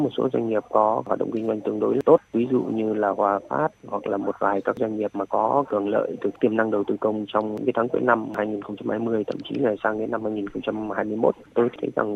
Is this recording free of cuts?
yes; 0 cuts

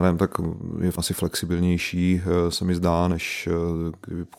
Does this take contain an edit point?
yes; 1 cut; at 1.0 s

